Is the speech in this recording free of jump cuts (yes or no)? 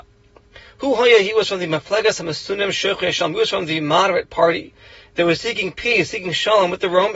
yes